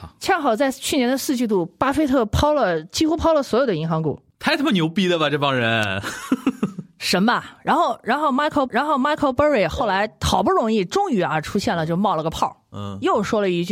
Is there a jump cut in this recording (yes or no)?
yes